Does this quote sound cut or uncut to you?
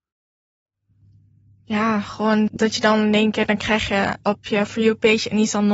cut